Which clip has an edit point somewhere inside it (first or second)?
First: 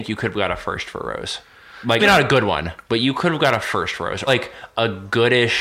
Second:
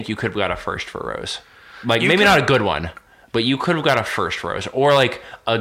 first